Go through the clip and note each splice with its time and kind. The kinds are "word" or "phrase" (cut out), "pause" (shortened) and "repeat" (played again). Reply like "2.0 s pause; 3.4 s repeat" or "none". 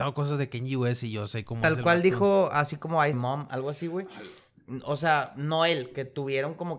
3.1 s phrase